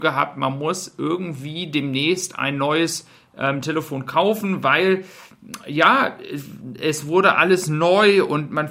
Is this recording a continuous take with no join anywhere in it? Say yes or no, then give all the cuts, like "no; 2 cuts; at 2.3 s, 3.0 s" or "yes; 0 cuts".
yes; 0 cuts